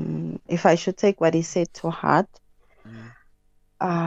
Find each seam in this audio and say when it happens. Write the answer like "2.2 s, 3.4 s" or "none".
none